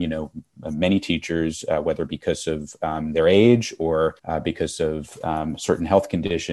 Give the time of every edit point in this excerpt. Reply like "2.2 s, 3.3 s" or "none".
4.2 s